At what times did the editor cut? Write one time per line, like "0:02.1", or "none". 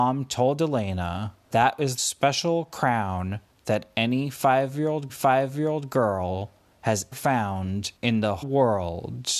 0:01.5
0:02.0
0:05.1
0:07.1
0:08.0
0:08.4

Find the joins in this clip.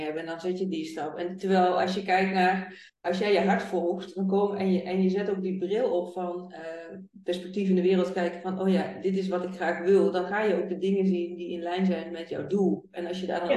0:02.9

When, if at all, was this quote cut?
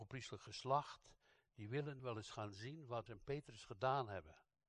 0:02.0
0:03.1

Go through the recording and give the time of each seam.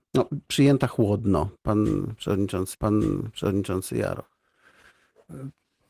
0:02.7

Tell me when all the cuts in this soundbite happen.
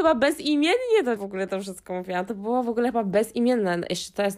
0:01.2

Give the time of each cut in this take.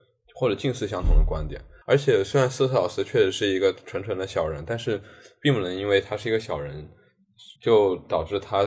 0:01.8
0:07.6

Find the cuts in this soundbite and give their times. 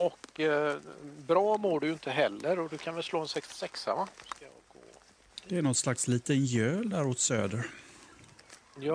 none

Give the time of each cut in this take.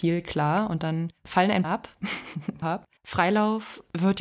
0:01.2
0:01.6
0:02.6
0:03.0

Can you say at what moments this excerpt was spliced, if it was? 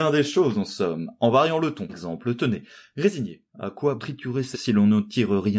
0:01.9
0:03.5
0:04.0
0:04.5

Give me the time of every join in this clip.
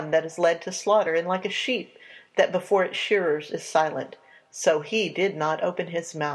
none

